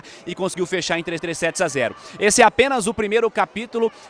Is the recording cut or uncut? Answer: cut